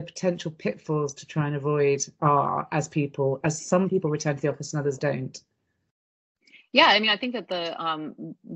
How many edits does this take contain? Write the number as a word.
zero